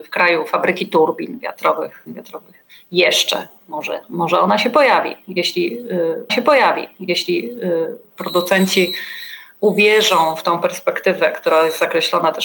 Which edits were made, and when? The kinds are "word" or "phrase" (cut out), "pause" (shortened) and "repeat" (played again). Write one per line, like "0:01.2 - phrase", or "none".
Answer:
0:02.1 - phrase
0:02.7 - pause
0:06.3 - repeat